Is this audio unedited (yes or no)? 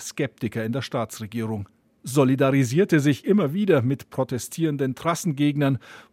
yes